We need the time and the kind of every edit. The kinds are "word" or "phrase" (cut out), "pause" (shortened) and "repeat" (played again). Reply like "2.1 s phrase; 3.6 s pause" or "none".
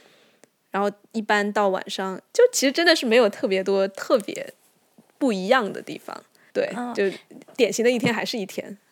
6.5 s word